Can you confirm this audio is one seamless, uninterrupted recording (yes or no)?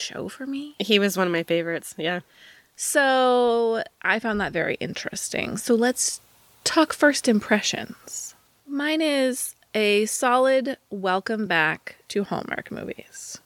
yes